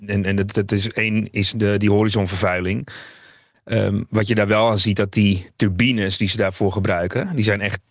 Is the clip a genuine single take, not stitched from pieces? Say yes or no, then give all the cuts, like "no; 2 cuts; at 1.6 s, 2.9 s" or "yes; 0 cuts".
yes; 0 cuts